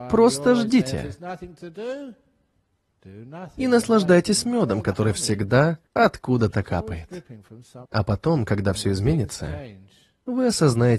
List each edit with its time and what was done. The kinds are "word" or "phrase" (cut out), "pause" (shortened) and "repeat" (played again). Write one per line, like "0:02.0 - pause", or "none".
0:05.9 - pause
0:07.9 - pause